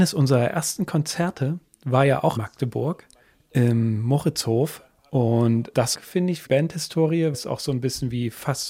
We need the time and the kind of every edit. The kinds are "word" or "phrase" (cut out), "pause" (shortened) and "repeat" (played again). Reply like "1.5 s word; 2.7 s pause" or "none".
2.4 s word; 4.9 s pause; 5.9 s phrase; 6.5 s word; 7.3 s word